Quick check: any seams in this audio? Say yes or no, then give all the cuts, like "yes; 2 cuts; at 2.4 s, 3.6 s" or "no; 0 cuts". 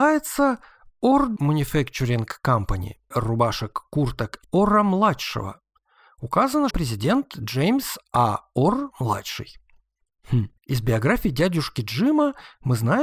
yes; 5 cuts; at 1.4 s, 3.1 s, 4.4 s, 6.7 s, 10.6 s